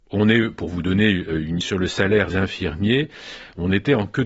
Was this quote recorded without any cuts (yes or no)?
no